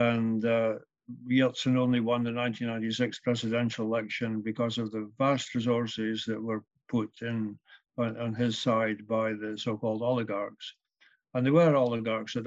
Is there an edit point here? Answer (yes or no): no